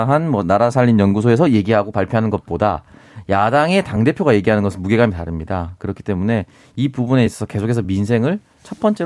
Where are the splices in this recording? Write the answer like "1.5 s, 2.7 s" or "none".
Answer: none